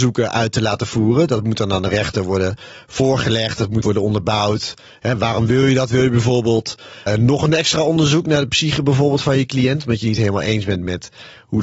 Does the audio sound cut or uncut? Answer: cut